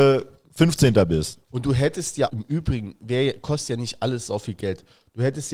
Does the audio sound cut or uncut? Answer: cut